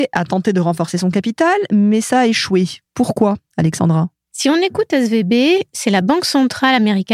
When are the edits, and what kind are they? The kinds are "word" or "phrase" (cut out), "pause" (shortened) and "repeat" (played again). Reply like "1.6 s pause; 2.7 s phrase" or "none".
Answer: none

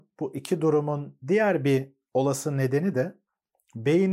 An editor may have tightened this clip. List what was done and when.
none

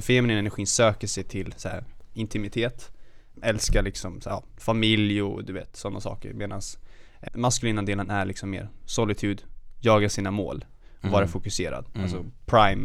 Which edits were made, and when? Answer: 3.3 s word; 7.3 s word

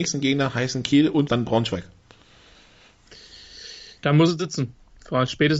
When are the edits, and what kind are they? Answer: 1.3 s word

